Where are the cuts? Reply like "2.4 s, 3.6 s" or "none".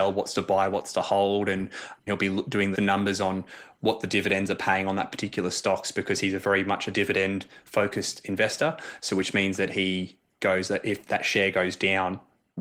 2.1 s, 2.7 s, 11.0 s